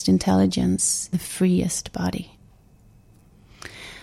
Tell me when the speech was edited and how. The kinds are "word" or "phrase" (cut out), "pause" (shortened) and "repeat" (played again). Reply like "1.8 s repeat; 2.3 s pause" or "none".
1.1 s word